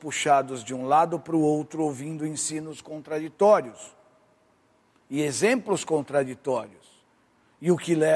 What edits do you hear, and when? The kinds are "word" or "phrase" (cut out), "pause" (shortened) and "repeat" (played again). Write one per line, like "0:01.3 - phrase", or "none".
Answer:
none